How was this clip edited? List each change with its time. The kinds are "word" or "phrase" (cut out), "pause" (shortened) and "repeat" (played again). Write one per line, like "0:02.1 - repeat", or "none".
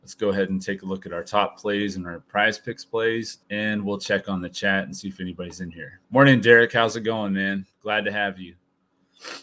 0:03.4 - pause
0:06.0 - pause

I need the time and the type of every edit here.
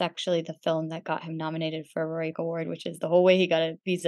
0:02.3 - word

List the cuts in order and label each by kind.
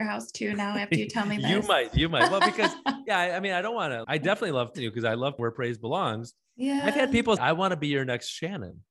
0:04.0 - word
0:04.7 - word
0:05.4 - word
0:07.4 - word

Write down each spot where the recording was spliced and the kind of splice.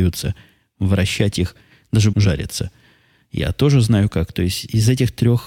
0:02.1 - word

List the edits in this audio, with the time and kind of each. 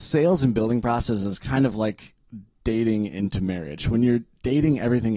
none

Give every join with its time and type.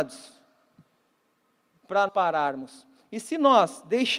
0:02.1 - word

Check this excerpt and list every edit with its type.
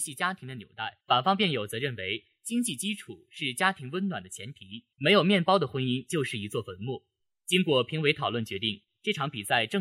0:01.0 - pause
0:04.9 - pause

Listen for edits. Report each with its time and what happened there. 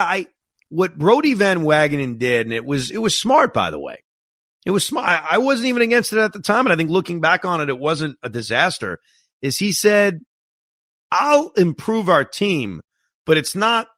none

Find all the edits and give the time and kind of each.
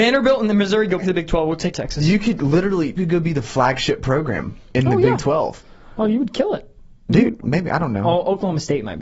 0:01.0 - word
0:01.7 - word
0:03.0 - word
0:07.4 - word

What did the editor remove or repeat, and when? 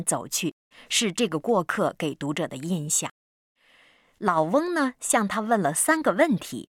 none

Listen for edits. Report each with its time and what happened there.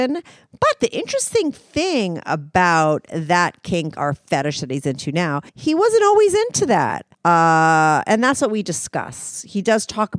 0:05.5 - pause
0:07.1 - pause

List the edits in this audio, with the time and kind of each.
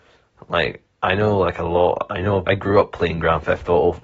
0:02.5 - word

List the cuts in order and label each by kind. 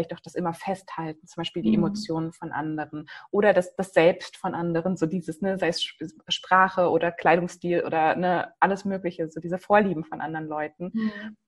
0:09.4 - word

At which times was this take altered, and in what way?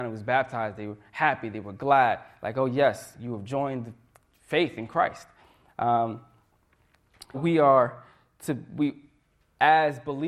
0:07.3 - word

